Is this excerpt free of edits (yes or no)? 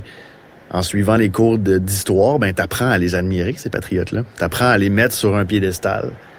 yes